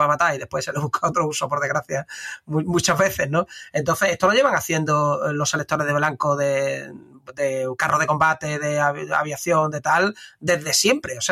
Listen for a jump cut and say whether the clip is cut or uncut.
uncut